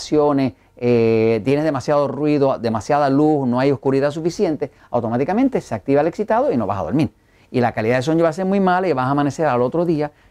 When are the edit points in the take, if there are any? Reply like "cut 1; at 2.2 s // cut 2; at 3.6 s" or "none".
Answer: none